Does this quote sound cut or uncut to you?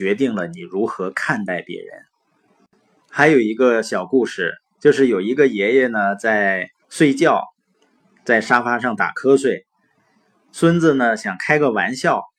cut